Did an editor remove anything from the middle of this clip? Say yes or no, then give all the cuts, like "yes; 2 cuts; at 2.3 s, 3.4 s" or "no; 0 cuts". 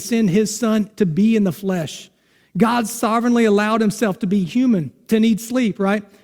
no; 0 cuts